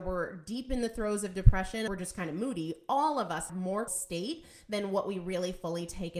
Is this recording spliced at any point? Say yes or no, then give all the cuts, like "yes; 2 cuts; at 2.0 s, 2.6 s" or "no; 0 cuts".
yes; 3 cuts; at 1.9 s, 3.5 s, 3.9 s